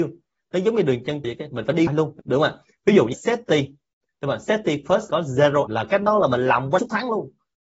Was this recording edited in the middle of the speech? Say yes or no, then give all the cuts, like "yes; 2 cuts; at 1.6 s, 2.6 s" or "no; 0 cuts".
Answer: yes; 7 cuts; at 1.2 s, 1.9 s, 2.2 s, 3.1 s, 5.1 s, 5.7 s, 6.8 s